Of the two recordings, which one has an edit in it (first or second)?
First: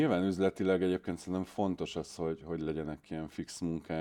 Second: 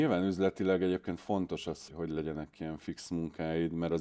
second